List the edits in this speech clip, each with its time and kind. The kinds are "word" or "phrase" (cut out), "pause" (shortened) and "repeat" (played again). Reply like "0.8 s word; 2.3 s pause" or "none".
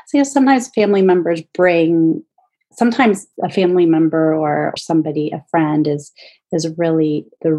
3.3 s pause; 4.8 s word